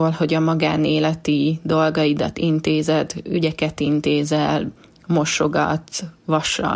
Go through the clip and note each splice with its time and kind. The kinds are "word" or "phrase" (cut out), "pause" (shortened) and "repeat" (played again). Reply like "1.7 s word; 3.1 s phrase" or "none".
none

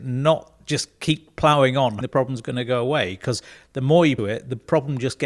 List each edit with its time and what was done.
2.0 s word; 4.2 s phrase

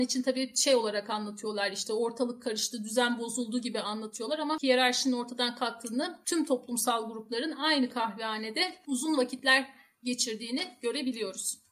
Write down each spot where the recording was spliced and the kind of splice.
none

